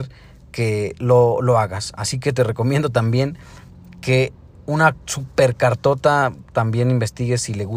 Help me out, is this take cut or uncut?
uncut